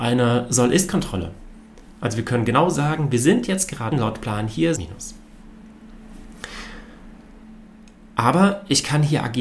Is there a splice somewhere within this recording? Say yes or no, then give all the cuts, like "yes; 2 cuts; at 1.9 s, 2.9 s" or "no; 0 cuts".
yes; 2 cuts; at 3.9 s, 4.7 s